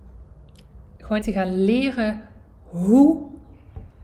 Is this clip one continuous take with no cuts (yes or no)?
no